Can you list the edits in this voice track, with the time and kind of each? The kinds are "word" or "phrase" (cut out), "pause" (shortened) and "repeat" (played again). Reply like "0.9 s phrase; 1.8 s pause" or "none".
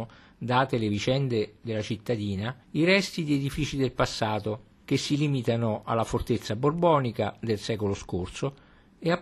2.6 s pause; 4.8 s pause